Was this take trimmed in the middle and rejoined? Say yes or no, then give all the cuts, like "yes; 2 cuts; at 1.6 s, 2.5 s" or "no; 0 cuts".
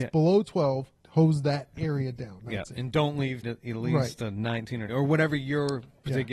yes; 3 cuts; at 1.0 s, 3.4 s, 4.9 s